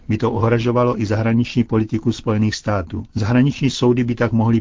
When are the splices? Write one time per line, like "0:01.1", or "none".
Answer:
0:03.1

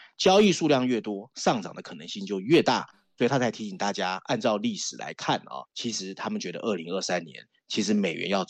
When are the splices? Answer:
0:05.6

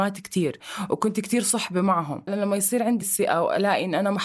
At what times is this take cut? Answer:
0:02.3
0:03.0

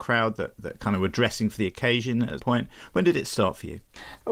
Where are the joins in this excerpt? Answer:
0:02.4

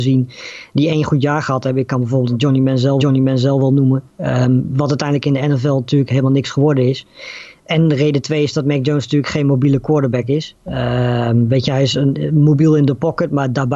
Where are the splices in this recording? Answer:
0:03.0

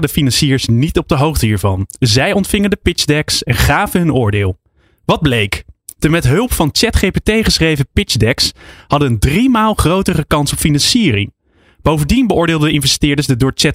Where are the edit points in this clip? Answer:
none

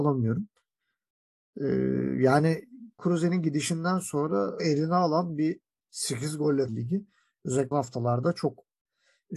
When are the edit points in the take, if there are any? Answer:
0:03.0
0:04.6
0:05.8
0:06.7
0:07.7

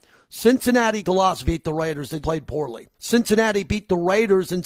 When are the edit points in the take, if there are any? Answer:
0:01.0
0:01.4
0:02.2
0:02.9

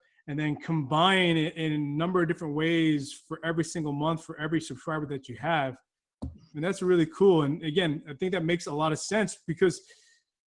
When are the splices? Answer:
none

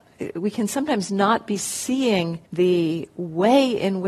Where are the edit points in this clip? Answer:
0:02.5

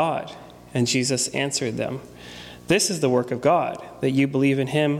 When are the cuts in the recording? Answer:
none

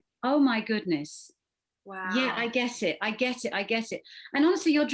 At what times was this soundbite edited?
none

